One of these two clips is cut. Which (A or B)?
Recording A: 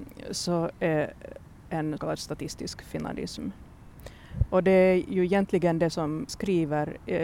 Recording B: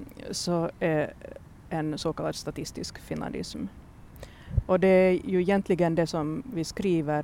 A